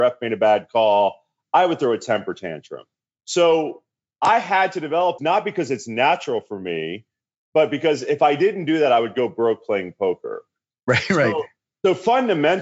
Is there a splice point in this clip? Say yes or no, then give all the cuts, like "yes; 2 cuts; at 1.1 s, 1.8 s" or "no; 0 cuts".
yes; 1 cut; at 5.2 s